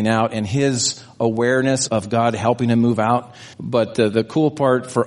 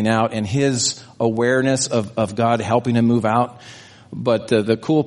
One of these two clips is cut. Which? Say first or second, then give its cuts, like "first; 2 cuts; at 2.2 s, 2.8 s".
first; 2 cuts; at 1.9 s, 3.5 s